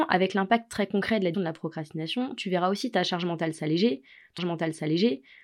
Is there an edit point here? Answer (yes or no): yes